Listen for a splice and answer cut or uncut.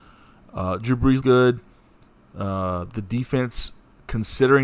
cut